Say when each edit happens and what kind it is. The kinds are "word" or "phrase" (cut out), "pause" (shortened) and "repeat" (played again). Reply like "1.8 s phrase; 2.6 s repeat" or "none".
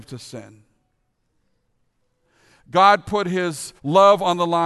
3.8 s pause

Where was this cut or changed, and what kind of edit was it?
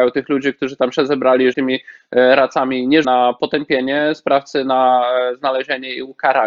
1.5 s word; 3.0 s phrase

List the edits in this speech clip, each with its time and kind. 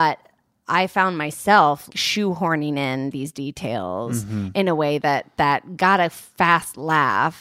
1.9 s word

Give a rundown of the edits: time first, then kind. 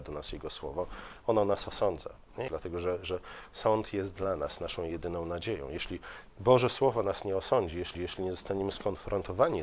2.5 s phrase; 7.9 s repeat

